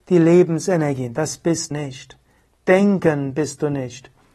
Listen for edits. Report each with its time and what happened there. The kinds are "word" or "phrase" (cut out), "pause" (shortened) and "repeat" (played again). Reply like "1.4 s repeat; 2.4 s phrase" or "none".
1.7 s word